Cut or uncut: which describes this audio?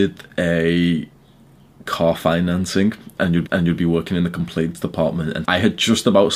cut